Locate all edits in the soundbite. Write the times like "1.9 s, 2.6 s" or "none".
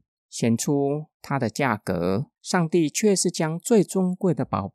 2.4 s

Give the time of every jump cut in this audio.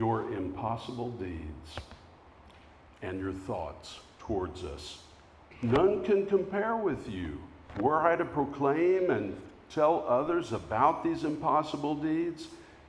none

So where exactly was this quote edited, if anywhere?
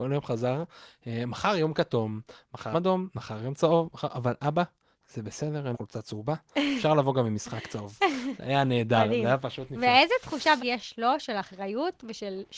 2.7 s, 5.7 s, 10.6 s

